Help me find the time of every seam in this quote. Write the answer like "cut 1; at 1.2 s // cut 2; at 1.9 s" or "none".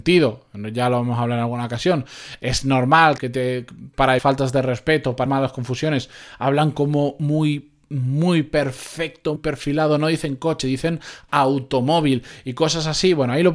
cut 1; at 3.2 s // cut 2; at 4.2 s // cut 3; at 5.3 s // cut 4; at 9.4 s